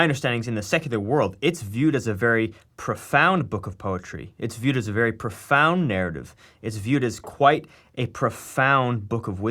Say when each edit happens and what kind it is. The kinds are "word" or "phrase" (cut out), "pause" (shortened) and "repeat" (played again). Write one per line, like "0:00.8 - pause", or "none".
none